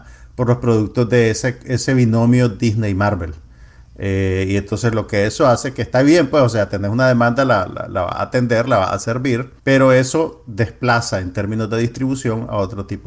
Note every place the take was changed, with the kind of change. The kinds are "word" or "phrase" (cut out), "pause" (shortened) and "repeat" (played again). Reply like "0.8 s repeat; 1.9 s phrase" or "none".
9.6 s pause